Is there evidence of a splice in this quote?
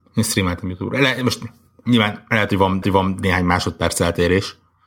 yes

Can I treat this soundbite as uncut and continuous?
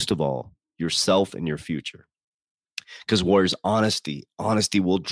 yes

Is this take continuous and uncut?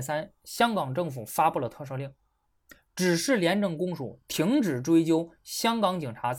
yes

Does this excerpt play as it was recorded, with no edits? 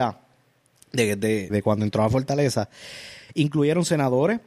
no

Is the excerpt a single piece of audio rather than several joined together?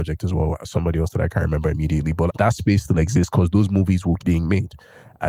no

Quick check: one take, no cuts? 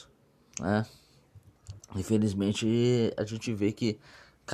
yes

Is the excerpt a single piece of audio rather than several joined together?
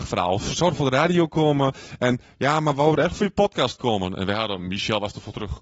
yes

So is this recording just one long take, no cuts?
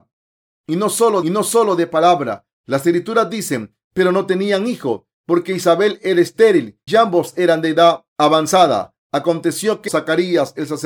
no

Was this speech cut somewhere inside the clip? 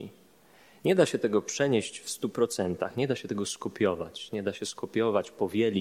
no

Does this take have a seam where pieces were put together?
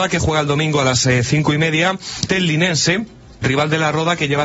yes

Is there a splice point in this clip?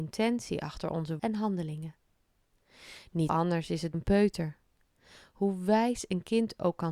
yes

